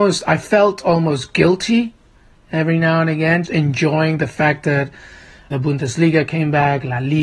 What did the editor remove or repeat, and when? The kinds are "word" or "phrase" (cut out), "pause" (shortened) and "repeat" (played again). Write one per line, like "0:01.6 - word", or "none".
0:03.4 - word
0:05.5 - word